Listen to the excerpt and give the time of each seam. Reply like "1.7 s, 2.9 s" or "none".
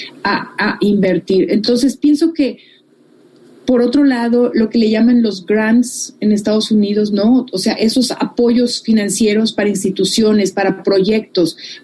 4.5 s